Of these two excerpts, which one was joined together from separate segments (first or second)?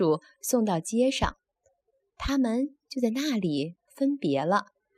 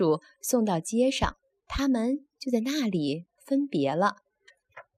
second